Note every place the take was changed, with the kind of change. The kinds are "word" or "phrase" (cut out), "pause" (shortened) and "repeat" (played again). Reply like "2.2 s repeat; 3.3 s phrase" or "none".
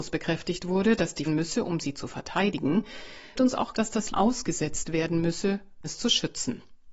1.3 s phrase; 3.3 s word; 3.7 s word; 4.1 s word; 5.8 s word